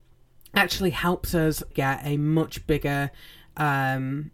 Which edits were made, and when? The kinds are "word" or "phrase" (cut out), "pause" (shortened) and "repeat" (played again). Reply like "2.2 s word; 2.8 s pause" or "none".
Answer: 1.7 s word